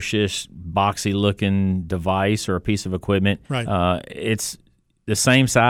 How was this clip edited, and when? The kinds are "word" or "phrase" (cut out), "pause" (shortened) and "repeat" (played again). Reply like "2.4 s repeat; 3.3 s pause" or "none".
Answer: 3.4 s pause

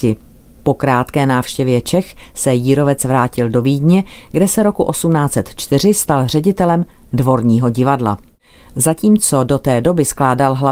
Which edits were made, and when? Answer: none

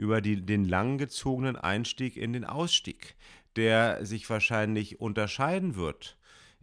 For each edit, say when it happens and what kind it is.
none

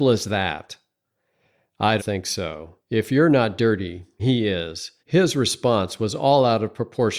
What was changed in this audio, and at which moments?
2.0 s word; 2.8 s pause; 4.2 s word; 5.0 s pause

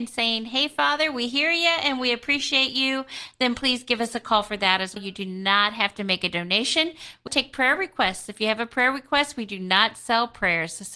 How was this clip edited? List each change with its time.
5.0 s word; 7.3 s word

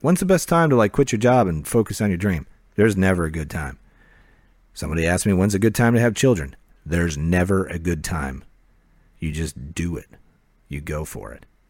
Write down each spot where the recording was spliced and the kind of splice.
none

